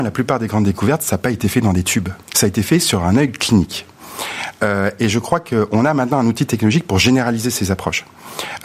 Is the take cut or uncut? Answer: cut